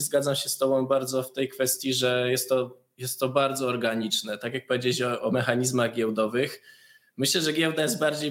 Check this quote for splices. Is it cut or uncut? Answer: uncut